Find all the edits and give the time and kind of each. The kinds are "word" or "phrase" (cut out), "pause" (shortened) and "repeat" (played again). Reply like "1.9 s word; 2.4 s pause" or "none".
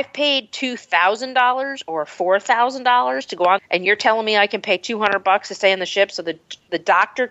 3.6 s phrase